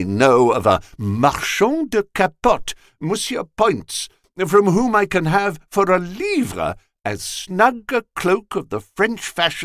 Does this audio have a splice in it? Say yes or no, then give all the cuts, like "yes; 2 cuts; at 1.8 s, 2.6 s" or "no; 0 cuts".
no; 0 cuts